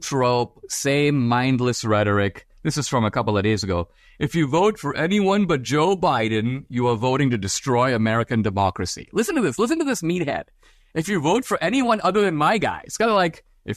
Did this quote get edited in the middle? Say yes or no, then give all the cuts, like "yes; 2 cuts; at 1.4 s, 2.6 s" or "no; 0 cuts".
no; 0 cuts